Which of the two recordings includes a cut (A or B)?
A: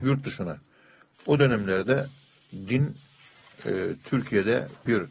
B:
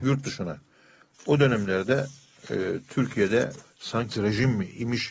B